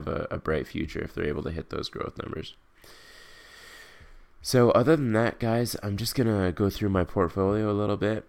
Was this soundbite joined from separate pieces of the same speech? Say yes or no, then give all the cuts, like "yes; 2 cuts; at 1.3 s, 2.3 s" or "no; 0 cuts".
no; 0 cuts